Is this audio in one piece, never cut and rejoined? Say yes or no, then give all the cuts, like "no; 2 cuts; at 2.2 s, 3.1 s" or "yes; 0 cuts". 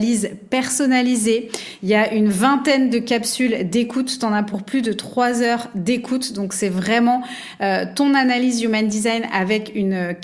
yes; 0 cuts